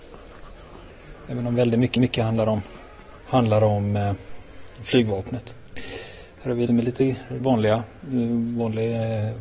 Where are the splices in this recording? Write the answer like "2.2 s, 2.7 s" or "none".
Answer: 2.0 s, 6.7 s, 7.4 s